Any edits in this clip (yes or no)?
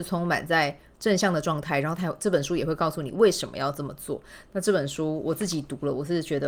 no